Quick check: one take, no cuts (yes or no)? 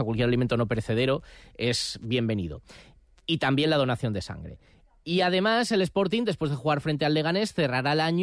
yes